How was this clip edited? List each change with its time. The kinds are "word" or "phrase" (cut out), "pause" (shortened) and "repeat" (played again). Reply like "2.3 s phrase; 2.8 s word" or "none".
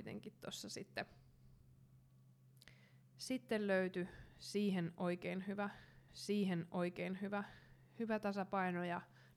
6.1 s repeat